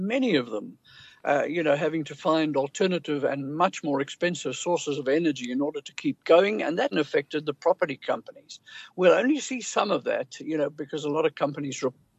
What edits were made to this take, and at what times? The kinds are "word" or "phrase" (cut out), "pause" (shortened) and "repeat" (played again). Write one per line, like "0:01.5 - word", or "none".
0:06.9 - word

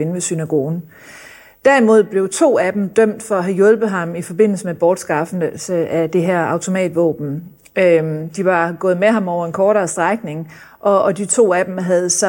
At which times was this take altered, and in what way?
none

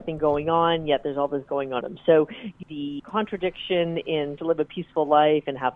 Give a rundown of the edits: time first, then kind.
0:01.5 - word
0:01.8 - word
0:02.6 - word
0:03.0 - word
0:04.4 - word

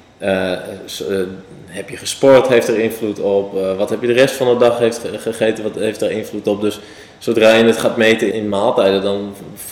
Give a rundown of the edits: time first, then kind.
0:08.3 - word

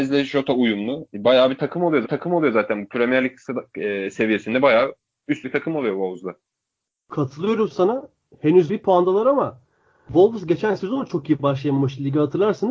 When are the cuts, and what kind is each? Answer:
0:02.0 - repeat
0:05.4 - word
0:08.7 - word

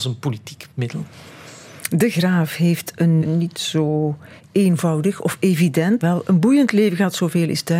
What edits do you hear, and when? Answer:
0:03.2 - word
0:06.0 - word

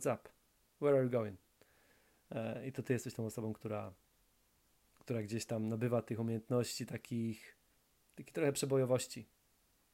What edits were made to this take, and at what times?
none

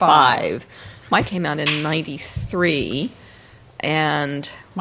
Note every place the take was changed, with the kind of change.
0:01.2 - phrase

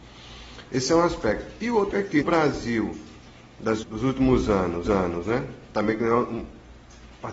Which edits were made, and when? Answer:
0:01.9 - word
0:02.2 - word
0:03.8 - word
0:04.8 - repeat

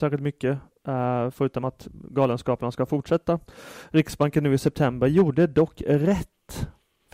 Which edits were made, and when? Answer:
none

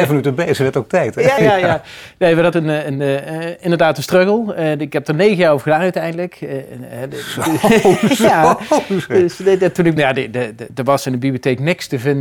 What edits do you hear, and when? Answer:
0:01.4 - word
0:02.5 - word
0:10.0 - word

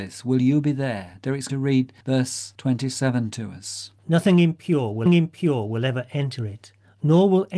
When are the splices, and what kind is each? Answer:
0:01.5 - word
0:02.0 - pause
0:04.0 - pause
0:05.1 - repeat

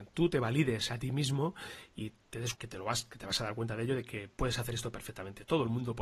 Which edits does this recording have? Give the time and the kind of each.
0:02.5 - word

